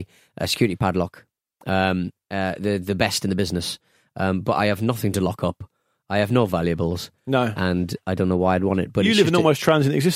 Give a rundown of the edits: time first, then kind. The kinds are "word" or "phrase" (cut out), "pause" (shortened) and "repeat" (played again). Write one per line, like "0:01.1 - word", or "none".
none